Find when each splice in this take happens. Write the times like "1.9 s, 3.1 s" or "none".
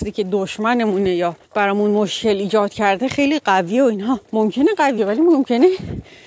1.4 s, 4.2 s, 5.0 s